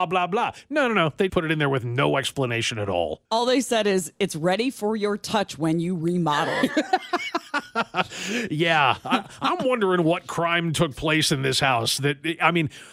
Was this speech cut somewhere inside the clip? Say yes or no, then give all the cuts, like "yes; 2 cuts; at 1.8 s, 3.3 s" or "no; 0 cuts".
yes; 2 cuts; at 1.3 s, 3.2 s